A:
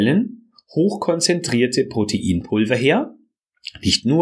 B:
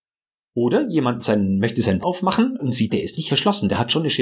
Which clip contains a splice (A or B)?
B